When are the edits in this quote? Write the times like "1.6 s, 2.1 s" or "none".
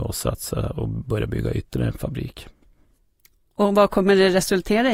none